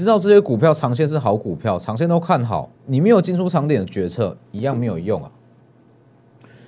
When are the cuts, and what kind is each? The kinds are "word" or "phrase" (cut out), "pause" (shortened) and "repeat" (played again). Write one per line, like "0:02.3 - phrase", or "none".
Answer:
0:02.8 - pause